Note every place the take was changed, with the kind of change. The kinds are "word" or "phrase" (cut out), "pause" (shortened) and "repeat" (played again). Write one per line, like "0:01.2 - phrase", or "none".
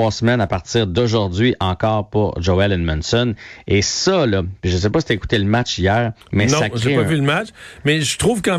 0:06.2 - pause